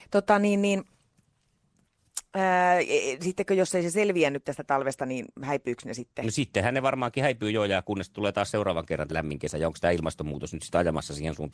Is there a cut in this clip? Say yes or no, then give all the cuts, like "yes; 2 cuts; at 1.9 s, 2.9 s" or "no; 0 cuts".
yes; 1 cut; at 9.1 s